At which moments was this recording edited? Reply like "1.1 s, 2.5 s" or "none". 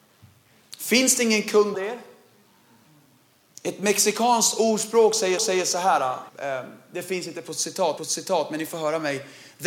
1.7 s, 5.4 s, 6.3 s, 8.0 s